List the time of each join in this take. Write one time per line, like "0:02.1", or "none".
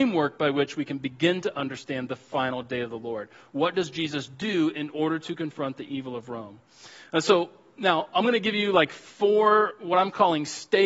none